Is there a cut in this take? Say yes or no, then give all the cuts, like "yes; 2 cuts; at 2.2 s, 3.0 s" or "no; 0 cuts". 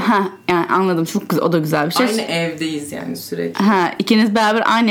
no; 0 cuts